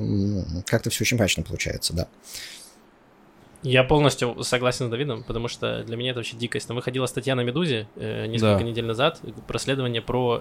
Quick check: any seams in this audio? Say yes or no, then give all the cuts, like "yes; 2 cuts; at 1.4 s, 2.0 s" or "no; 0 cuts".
no; 0 cuts